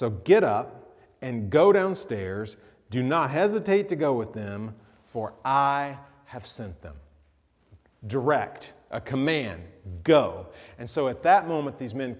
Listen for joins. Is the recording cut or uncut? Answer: uncut